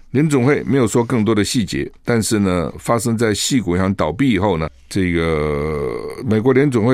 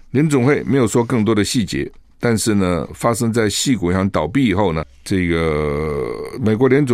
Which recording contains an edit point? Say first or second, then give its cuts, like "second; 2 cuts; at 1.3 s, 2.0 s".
first; 1 cut; at 2.0 s